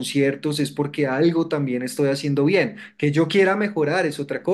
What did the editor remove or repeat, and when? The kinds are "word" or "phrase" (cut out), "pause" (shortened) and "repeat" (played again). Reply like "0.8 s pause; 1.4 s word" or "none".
none